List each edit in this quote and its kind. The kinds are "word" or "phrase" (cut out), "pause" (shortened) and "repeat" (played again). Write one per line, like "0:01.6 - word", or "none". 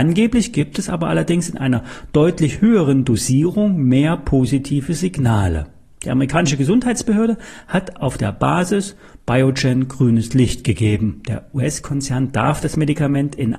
none